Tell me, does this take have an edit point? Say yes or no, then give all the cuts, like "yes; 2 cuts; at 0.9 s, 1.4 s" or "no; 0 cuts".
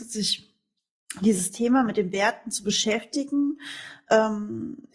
no; 0 cuts